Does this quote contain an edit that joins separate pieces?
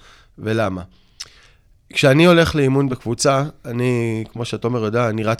no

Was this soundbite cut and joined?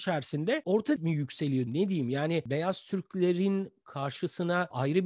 yes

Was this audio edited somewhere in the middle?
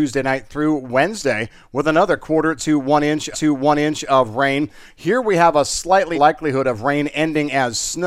yes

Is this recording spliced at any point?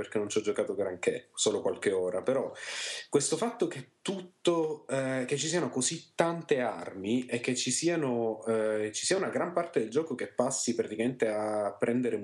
no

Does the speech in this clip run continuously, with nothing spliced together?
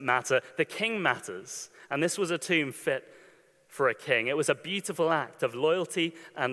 yes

